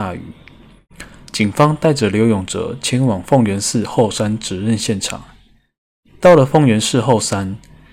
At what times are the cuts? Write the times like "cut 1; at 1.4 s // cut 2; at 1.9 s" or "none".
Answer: none